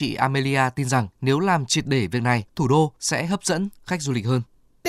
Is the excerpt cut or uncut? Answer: cut